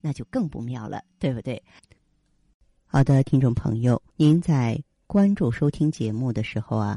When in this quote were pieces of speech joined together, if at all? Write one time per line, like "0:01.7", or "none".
0:04.1